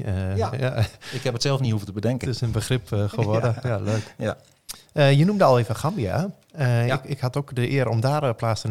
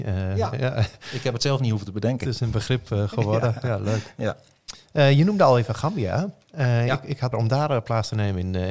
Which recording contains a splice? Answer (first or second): second